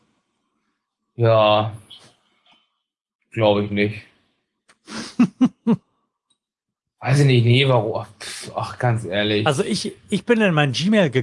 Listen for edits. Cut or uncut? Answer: uncut